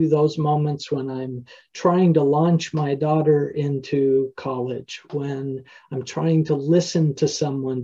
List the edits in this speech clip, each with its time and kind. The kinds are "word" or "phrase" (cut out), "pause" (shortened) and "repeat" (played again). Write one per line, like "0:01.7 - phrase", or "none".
none